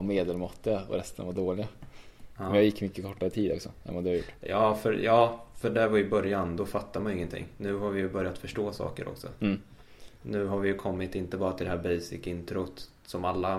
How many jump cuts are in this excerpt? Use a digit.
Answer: 0